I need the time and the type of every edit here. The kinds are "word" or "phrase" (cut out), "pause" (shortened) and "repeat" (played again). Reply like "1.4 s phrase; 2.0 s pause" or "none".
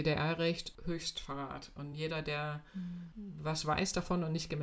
none